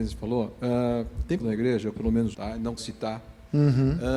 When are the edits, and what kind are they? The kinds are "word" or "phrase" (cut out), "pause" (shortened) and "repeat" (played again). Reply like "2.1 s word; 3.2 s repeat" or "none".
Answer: 1.4 s word; 1.9 s word; 2.3 s word; 2.8 s word